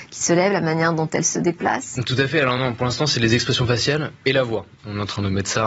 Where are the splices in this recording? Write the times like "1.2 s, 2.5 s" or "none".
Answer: none